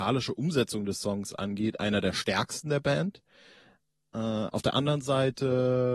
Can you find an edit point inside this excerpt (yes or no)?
no